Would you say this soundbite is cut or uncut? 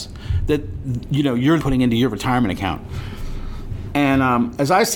cut